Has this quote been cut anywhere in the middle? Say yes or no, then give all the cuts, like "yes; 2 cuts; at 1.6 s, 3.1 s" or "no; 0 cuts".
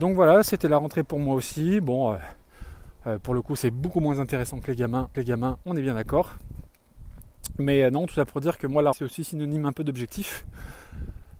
yes; 2 cuts; at 5.1 s, 8.9 s